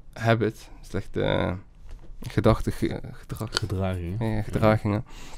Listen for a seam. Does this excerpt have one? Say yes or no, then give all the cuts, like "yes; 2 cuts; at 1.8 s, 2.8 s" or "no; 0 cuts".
yes; 1 cut; at 2.9 s